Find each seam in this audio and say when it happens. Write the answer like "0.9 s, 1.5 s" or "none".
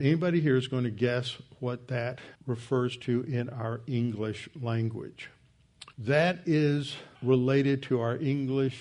2.3 s, 5.9 s, 7.1 s